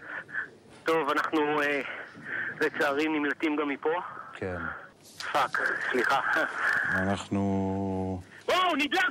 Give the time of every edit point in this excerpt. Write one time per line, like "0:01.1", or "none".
none